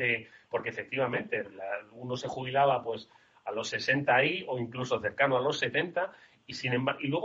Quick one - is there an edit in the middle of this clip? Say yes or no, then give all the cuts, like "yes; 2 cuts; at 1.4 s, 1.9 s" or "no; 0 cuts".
no; 0 cuts